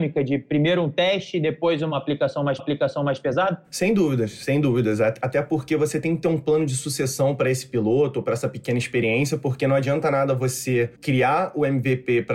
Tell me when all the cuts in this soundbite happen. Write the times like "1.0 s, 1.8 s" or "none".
2.6 s, 10.9 s